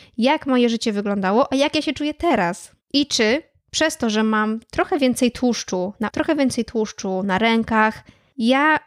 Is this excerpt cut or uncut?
cut